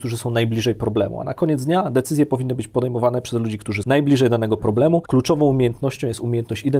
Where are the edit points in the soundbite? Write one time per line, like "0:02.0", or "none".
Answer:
0:03.8